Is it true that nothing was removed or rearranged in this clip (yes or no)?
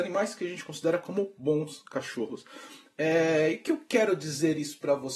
yes